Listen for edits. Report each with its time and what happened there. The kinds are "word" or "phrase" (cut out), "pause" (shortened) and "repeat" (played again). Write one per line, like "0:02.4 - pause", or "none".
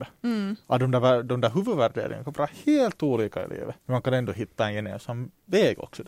0:03.8 - pause